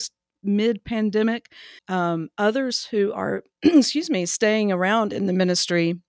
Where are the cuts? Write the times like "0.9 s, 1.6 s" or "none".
1.8 s